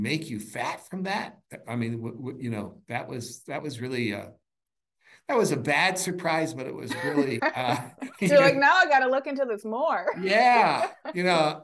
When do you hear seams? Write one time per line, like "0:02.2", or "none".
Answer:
0:08.2